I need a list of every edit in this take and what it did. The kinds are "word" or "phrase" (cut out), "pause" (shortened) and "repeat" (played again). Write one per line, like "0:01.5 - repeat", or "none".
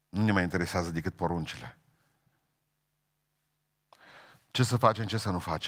none